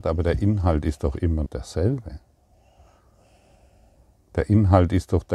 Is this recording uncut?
no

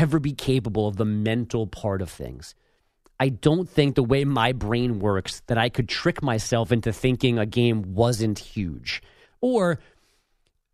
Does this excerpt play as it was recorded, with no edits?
yes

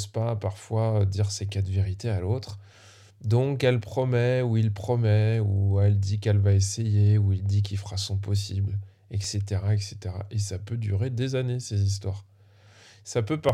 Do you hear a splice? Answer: no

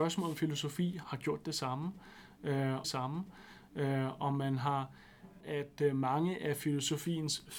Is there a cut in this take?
yes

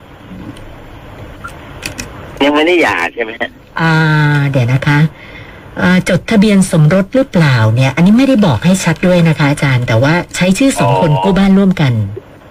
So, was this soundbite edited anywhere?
no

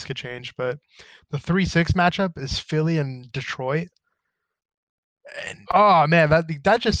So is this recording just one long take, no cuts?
no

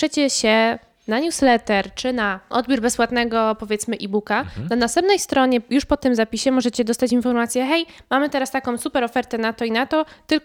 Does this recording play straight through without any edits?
yes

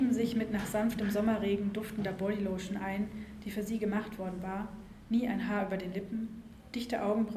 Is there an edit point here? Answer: no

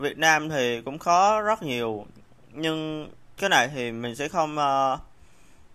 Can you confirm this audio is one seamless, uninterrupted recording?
yes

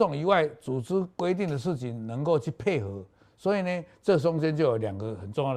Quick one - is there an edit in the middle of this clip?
no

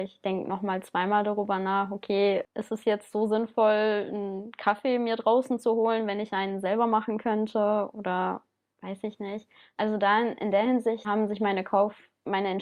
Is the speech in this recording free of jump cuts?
yes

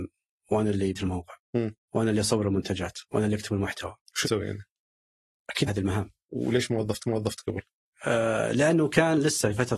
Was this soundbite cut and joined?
yes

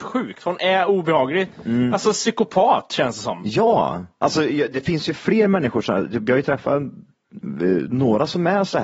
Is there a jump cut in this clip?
no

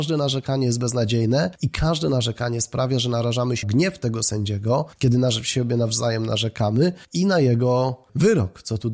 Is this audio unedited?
no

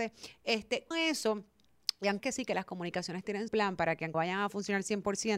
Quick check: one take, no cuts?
no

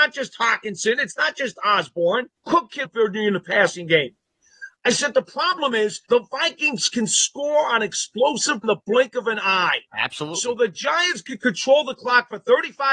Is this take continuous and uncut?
no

